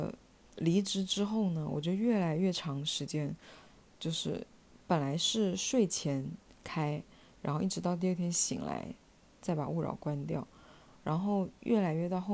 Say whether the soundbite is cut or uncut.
uncut